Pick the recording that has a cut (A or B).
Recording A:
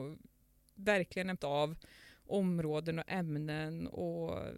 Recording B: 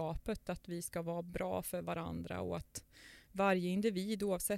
A